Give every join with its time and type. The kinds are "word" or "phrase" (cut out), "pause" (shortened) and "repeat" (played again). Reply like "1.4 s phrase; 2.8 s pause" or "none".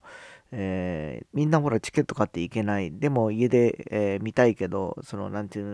1.3 s pause